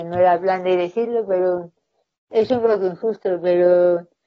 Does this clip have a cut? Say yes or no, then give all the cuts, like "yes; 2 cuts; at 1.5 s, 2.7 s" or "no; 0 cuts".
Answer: no; 0 cuts